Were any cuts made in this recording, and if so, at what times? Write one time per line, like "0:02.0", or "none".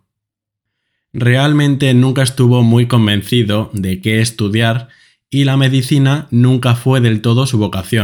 none